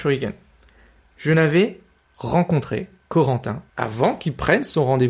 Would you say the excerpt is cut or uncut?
cut